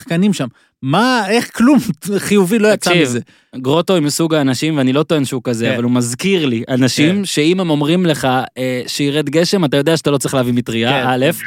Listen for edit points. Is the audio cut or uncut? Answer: uncut